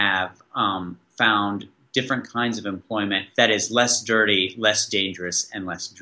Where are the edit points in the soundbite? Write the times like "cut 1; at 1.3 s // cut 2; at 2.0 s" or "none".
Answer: none